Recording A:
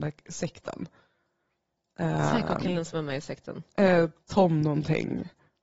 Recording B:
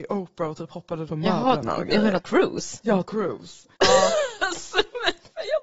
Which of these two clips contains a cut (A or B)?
B